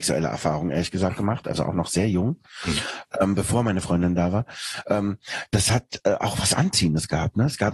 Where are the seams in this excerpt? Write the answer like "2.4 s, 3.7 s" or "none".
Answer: none